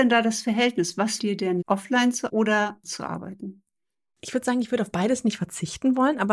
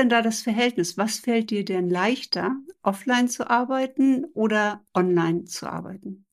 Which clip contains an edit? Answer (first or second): first